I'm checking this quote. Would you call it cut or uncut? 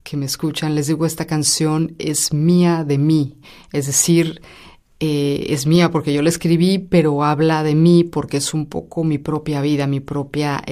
uncut